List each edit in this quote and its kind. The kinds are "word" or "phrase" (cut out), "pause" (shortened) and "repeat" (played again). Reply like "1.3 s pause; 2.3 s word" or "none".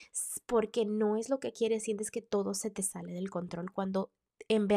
none